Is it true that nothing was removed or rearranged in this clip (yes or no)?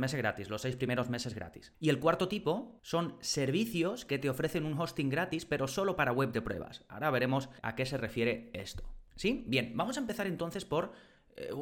no